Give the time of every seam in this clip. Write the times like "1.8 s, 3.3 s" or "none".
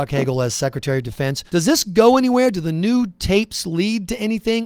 1.5 s